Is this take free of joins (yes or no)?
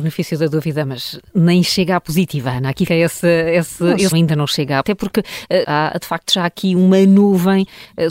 no